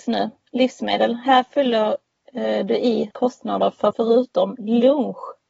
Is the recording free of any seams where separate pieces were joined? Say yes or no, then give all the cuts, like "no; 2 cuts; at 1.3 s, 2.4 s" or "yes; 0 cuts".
no; 2 cuts; at 3.1 s, 3.9 s